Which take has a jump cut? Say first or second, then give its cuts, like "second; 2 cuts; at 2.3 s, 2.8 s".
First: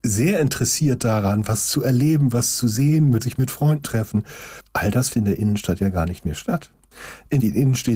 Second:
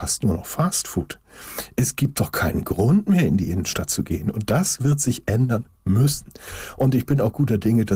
first; 3 cuts; at 3.2 s, 3.8 s, 5.1 s